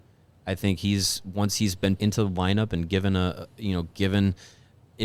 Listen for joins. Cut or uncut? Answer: cut